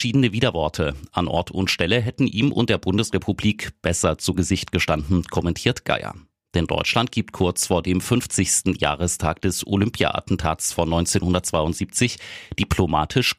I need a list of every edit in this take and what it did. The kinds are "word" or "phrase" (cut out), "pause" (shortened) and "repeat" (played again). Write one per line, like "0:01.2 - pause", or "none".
none